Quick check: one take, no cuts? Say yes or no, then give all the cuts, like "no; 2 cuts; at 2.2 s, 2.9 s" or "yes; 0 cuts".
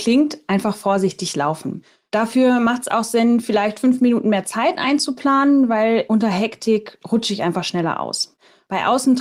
yes; 0 cuts